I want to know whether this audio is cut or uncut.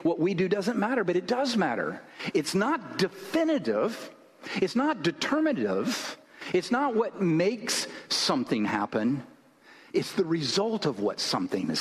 uncut